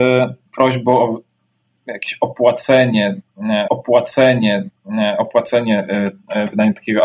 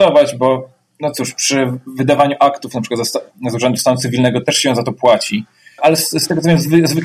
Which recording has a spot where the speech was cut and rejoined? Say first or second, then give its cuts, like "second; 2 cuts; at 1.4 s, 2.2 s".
first; 1 cut; at 3.7 s